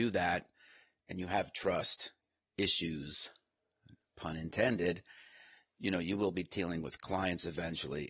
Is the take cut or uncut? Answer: uncut